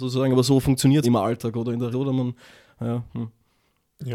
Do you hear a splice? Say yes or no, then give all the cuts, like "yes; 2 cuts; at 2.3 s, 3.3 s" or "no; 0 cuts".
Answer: yes; 3 cuts; at 1.0 s, 1.9 s, 3.1 s